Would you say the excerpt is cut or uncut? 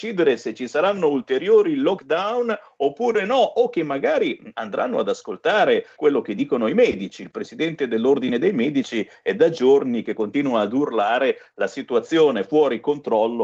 cut